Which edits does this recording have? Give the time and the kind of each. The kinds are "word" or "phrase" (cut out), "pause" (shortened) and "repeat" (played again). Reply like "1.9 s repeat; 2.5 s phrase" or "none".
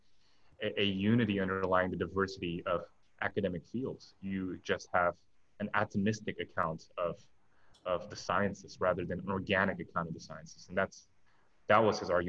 none